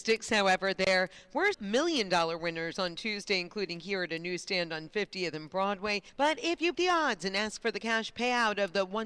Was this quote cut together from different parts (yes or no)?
yes